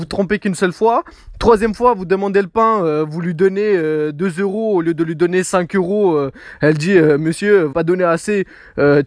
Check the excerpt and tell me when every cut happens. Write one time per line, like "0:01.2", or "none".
0:07.7

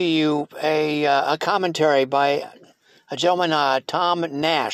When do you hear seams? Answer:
none

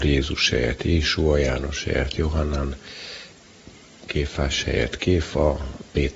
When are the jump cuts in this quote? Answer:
none

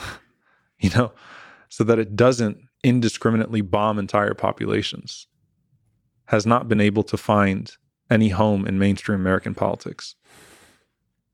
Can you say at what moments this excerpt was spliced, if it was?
none

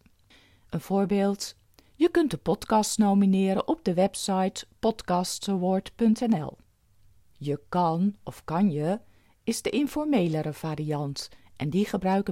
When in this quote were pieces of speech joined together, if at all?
none

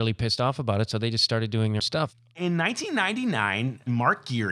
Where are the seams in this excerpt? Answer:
0:01.8

